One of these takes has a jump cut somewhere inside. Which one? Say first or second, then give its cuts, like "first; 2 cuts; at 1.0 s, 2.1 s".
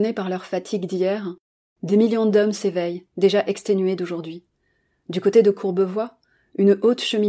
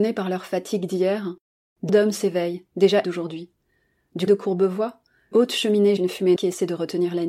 second; 6 cuts; at 1.9 s, 3.0 s, 4.3 s, 5.3 s, 6.0 s, 6.4 s